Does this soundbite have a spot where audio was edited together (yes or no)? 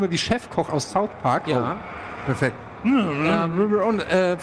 no